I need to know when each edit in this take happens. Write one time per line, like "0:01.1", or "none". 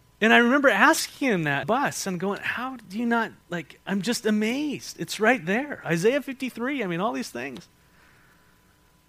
0:01.6
0:03.4